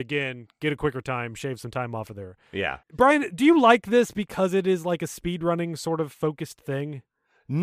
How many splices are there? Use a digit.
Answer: 1